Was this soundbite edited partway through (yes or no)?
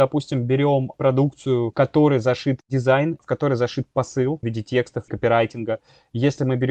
yes